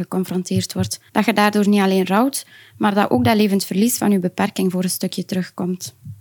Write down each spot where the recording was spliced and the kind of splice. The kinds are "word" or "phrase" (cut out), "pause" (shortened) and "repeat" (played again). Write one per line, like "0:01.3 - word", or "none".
0:01.1 - pause